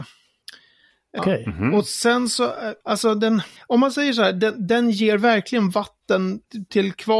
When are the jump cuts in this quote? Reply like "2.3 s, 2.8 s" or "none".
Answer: 1.2 s, 2.8 s, 3.6 s